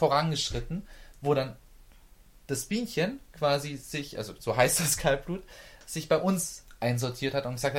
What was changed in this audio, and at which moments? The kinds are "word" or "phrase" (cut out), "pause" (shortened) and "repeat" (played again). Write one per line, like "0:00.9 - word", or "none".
none